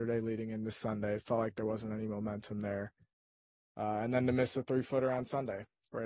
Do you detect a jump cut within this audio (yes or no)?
no